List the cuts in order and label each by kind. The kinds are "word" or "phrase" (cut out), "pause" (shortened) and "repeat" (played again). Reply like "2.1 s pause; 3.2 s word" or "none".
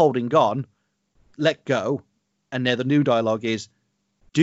none